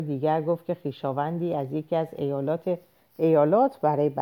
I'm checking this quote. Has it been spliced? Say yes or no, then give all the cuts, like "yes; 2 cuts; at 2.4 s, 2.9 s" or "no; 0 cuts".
no; 0 cuts